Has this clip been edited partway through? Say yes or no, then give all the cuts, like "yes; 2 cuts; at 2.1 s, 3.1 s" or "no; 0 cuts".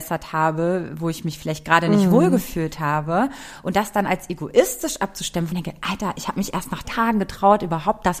yes; 2 cuts; at 5.5 s, 6.8 s